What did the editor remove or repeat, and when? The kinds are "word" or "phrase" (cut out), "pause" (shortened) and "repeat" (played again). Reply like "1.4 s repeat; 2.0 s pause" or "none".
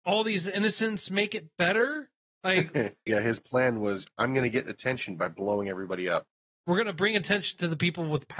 3.1 s word